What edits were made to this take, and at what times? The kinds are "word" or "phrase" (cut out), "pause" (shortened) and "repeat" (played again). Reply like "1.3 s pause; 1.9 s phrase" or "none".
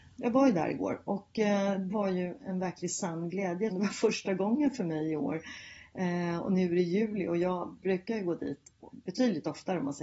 1.9 s word; 3.7 s word; 8.9 s word